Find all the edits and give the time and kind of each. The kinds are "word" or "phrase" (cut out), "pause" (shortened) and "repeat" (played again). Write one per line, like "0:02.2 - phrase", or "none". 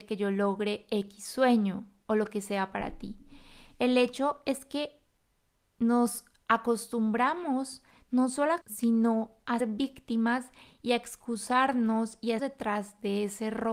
0:08.6 - word
0:09.6 - word
0:12.4 - word

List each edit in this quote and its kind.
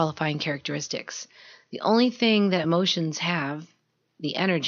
none

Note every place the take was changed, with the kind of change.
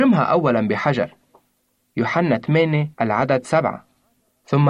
0:02.9 - pause

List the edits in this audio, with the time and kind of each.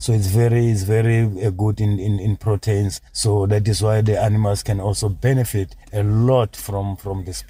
0:03.1 - pause
0:05.8 - pause

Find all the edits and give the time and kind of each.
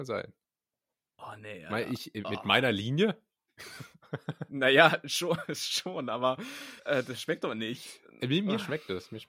0:06.8 - pause

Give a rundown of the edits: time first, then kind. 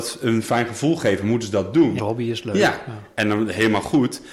0:02.0 - word

